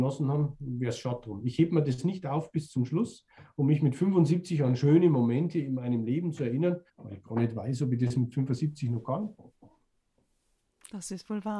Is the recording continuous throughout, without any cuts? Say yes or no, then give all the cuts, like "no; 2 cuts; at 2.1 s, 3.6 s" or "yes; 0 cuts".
no; 1 cut; at 6.9 s